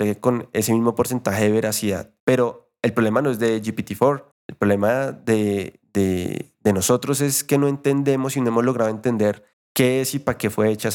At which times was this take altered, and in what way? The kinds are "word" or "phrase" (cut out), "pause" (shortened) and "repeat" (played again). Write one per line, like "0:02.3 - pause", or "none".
0:02.2 - pause
0:04.3 - pause
0:09.5 - pause